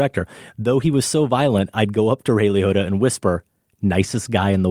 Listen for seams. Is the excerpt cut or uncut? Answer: uncut